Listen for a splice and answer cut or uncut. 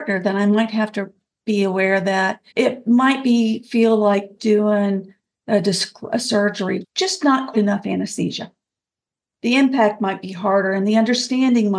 cut